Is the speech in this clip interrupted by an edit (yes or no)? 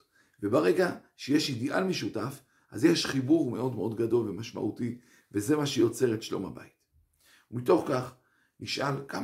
no